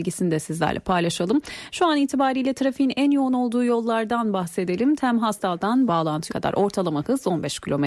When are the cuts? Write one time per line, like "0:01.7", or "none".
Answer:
0:05.9
0:06.3